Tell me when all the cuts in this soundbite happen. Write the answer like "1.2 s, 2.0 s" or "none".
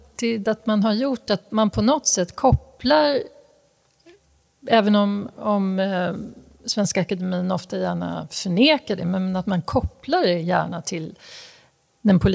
none

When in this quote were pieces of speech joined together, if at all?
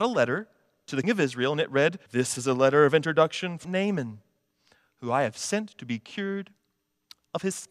1.0 s, 2.1 s, 3.6 s

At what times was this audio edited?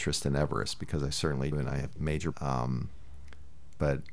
1.5 s, 1.9 s, 2.3 s

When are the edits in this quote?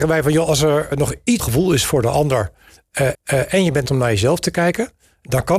0.9 s, 1.4 s, 3.1 s, 3.9 s

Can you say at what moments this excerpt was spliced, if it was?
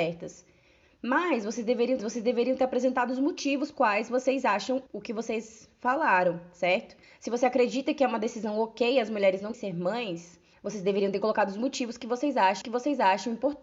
2.0 s, 3.7 s, 4.9 s, 7.0 s, 9.5 s, 10.5 s, 12.6 s

